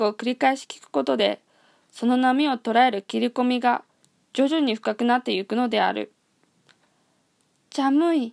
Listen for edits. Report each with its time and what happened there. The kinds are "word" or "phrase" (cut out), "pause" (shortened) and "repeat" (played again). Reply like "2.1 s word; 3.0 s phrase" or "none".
none